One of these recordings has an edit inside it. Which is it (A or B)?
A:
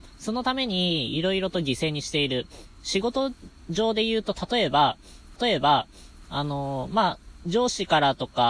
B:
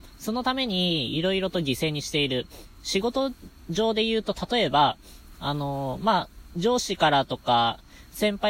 A